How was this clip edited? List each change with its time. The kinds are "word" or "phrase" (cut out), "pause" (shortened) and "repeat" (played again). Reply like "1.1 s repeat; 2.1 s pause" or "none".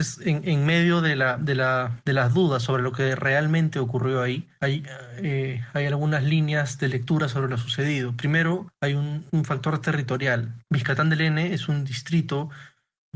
9.3 s word